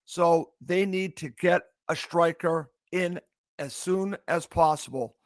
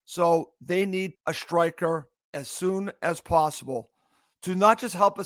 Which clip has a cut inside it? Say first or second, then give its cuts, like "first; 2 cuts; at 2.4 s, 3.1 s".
second; 2 cuts; at 1.1 s, 2.2 s